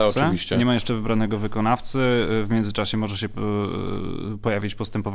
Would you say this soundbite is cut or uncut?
uncut